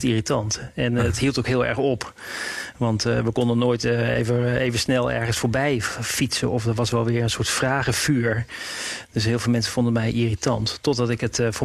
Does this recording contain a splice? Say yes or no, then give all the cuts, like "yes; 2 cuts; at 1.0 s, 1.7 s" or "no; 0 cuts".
no; 0 cuts